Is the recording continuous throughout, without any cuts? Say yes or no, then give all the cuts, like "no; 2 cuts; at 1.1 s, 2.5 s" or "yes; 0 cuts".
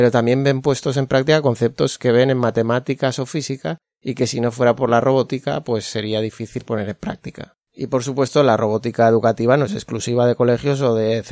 no; 1 cut; at 7.6 s